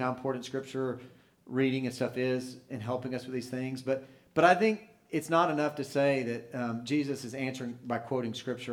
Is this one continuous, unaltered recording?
yes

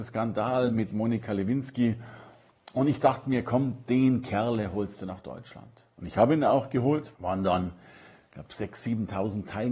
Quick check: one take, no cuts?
no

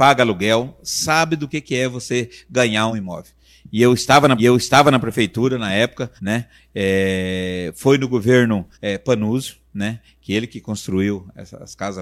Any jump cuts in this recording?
yes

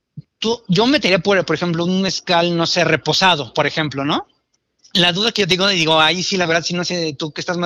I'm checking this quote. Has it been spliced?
no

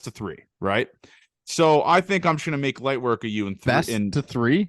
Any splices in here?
no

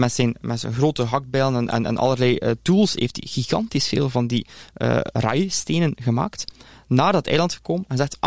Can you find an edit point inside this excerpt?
no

